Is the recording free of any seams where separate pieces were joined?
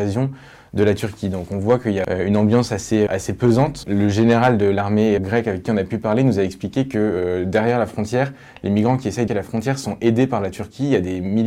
no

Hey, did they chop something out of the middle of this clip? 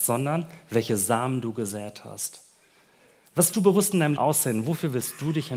yes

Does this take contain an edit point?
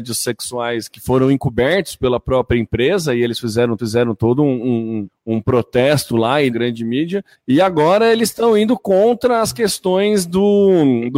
yes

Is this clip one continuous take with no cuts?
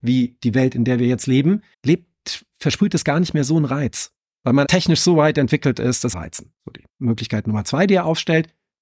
no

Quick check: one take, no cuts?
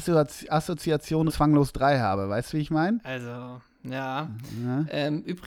no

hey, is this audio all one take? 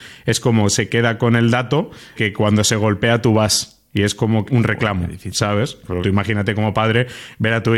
no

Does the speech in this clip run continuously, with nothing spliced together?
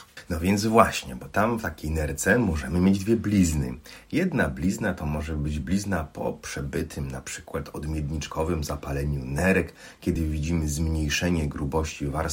yes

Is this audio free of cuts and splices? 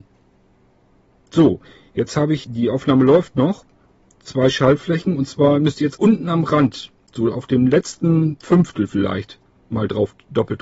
no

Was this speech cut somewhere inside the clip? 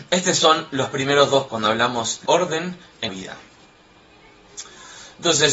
yes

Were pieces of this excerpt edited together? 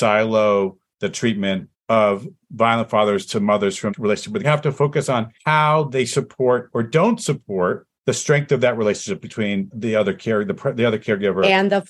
yes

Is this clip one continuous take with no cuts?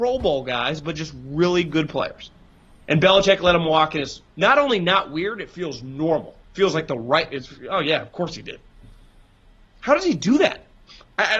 no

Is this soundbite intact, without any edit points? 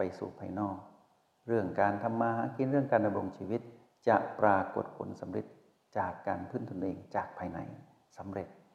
yes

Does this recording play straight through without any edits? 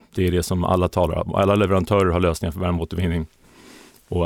yes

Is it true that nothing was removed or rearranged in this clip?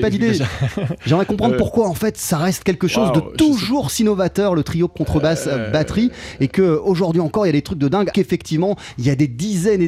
no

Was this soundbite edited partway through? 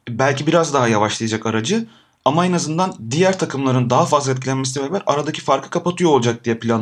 no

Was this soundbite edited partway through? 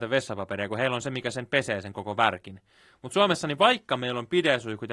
no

